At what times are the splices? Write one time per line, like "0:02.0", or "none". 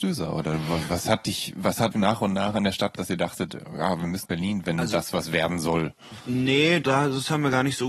0:01.9
0:03.0
0:04.2
0:04.6
0:06.8